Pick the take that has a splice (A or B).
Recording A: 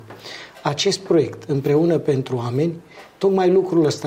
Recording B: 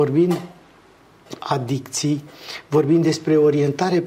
B